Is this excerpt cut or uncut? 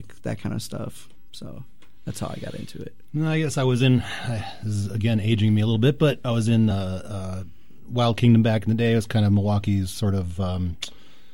uncut